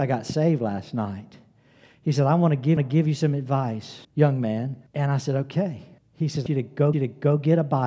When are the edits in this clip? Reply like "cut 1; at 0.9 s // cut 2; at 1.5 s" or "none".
cut 1; at 2.8 s // cut 2; at 4.0 s // cut 3; at 4.9 s // cut 4; at 6.0 s // cut 5; at 6.5 s // cut 6; at 6.9 s